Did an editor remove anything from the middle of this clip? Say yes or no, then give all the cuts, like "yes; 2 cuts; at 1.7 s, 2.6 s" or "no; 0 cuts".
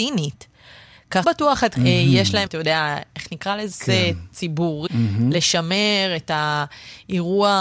yes; 5 cuts; at 1.2 s, 1.7 s, 2.5 s, 3.7 s, 4.9 s